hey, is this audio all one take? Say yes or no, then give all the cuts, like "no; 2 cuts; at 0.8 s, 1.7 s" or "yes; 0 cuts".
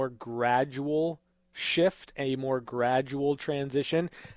yes; 0 cuts